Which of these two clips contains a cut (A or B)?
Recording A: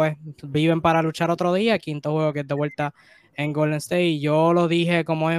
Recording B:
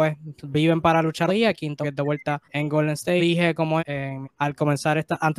B